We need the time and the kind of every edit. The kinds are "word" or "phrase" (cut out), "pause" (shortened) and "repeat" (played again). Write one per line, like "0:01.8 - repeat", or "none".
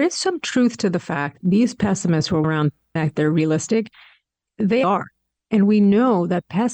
0:01.4 - word
0:02.4 - word
0:03.0 - word
0:04.8 - word